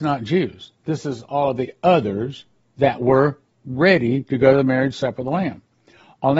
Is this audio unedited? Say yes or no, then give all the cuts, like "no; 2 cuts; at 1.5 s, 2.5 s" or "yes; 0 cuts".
yes; 0 cuts